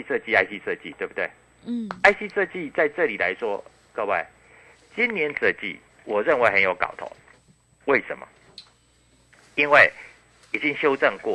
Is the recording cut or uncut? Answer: cut